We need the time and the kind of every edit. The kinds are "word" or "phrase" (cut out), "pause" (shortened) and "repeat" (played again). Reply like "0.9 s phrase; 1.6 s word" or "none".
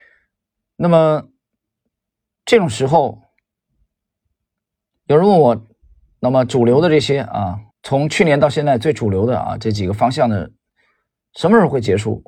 7.7 s pause